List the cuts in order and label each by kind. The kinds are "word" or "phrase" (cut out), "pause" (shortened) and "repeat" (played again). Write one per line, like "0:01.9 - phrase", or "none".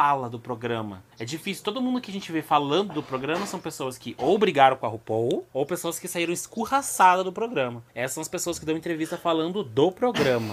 0:01.1 - pause
0:05.5 - pause
0:07.9 - pause